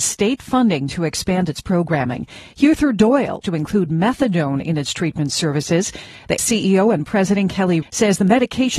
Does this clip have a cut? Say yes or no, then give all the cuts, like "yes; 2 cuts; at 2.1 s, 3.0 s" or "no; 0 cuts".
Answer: yes; 3 cuts; at 3.4 s, 6.4 s, 7.8 s